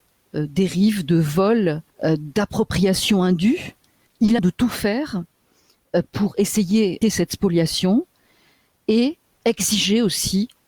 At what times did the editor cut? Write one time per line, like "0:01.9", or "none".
0:01.9
0:04.1
0:04.4
0:07.0